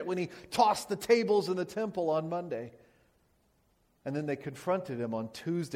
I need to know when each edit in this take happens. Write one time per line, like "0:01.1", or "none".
none